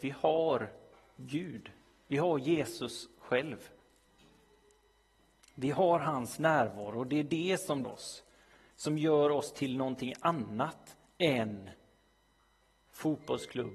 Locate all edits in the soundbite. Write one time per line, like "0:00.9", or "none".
0:07.8